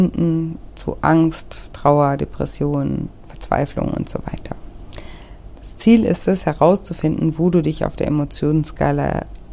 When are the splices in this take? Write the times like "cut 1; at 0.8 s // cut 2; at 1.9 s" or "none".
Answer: none